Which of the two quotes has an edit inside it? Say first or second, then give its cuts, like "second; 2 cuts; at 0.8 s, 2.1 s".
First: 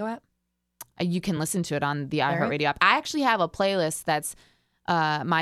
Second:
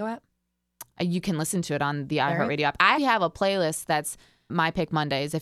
second; 2 cuts; at 3.0 s, 4.5 s